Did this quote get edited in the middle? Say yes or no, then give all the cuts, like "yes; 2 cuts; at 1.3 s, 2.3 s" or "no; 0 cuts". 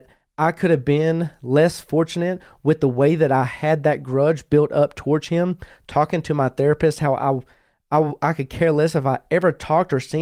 no; 0 cuts